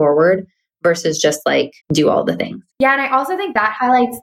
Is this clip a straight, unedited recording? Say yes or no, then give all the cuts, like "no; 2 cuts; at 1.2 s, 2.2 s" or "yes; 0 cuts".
no; 2 cuts; at 1.8 s, 2.7 s